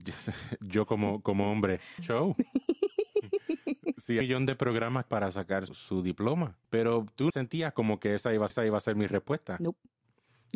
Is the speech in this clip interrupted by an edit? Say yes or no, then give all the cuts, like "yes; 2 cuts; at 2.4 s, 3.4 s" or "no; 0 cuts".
yes; 7 cuts; at 2.0 s, 4.2 s, 5.1 s, 5.7 s, 6.6 s, 7.3 s, 8.5 s